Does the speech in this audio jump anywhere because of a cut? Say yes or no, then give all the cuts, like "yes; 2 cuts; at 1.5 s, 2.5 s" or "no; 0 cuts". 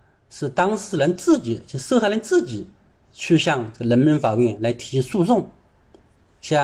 no; 0 cuts